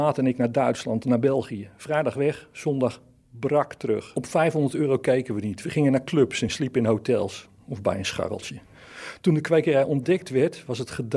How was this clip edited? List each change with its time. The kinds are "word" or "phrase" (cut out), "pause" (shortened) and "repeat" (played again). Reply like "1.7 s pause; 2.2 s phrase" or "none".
none